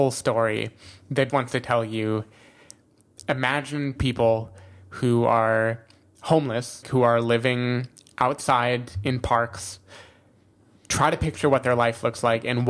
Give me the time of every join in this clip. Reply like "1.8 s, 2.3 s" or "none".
1.3 s, 4.0 s, 6.8 s